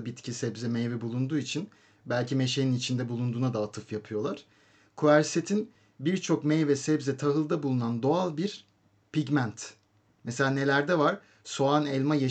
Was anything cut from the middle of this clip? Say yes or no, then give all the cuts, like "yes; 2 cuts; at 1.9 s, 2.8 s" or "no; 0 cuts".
no; 0 cuts